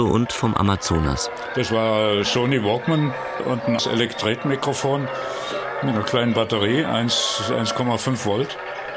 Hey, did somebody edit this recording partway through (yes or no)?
yes